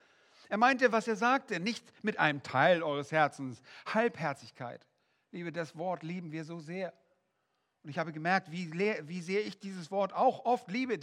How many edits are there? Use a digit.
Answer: 0